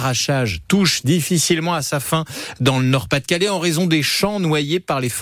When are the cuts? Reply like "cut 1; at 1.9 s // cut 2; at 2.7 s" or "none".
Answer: none